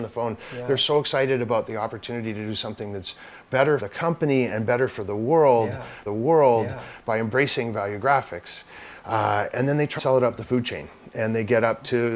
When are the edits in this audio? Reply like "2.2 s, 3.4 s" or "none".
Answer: 3.8 s, 6.1 s, 10.0 s